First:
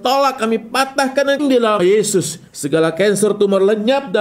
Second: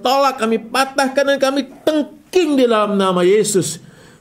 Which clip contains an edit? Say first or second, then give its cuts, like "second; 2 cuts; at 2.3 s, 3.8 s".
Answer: first; 3 cuts; at 1.4 s, 1.8 s, 2.5 s